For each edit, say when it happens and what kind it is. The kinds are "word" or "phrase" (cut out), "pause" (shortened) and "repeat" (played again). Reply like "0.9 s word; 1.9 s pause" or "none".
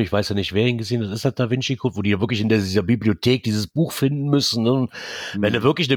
none